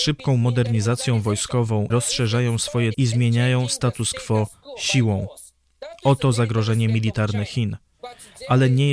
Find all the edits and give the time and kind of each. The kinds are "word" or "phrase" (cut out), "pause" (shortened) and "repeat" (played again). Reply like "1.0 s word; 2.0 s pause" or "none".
1.9 s word; 2.9 s word